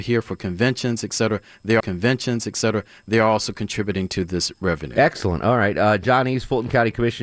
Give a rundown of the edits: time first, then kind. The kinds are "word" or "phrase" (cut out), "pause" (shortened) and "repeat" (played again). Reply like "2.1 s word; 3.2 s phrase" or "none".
1.8 s repeat